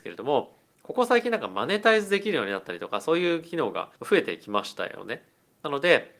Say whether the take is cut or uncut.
cut